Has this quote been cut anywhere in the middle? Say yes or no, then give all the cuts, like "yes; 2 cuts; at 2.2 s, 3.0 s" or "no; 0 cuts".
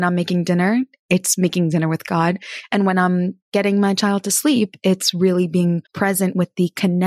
yes; 1 cut; at 5.8 s